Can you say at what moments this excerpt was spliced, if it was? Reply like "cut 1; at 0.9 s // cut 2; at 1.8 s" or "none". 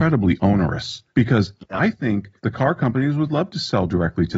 cut 1; at 1.1 s // cut 2; at 2.4 s